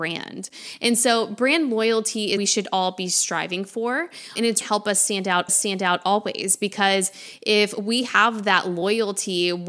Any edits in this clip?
yes; 3 cuts; at 2.4 s, 4.6 s, 5.5 s

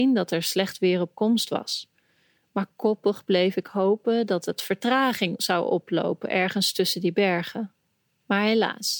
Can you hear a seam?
no; 0 cuts

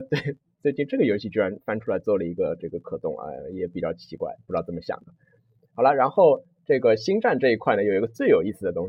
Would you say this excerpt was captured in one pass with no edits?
yes; 0 cuts

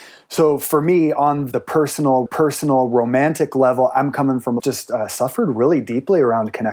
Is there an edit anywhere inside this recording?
yes; 2 cuts; at 2.3 s, 4.6 s

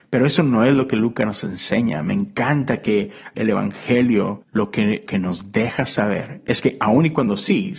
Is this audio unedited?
no; 3 cuts; at 3.3 s, 4.4 s, 5.1 s

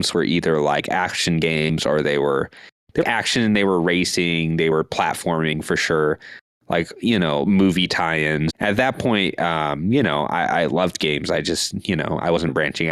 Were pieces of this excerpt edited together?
yes; 2 cuts; at 3.0 s, 8.5 s

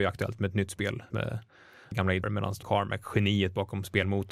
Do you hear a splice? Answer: yes; 4 cuts; at 1.1 s, 1.9 s, 2.2 s, 2.6 s

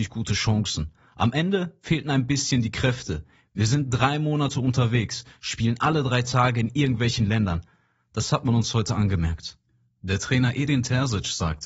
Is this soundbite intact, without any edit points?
yes; 0 cuts

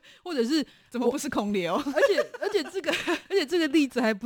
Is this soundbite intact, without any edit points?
no; 1 cut; at 3.3 s

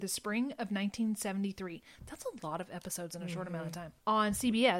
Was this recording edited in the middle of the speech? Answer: no; 0 cuts

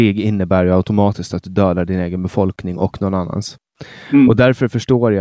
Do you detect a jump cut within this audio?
no; 0 cuts

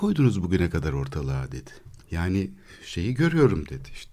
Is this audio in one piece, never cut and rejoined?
no; 1 cut; at 2.0 s

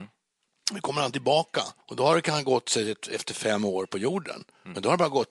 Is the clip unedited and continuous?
no; 1 cut; at 1.8 s

